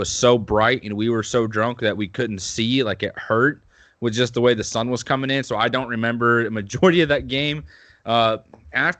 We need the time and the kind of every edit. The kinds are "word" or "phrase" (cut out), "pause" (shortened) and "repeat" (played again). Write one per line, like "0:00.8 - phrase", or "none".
none